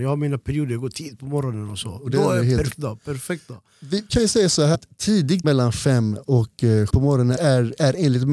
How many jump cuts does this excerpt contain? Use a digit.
7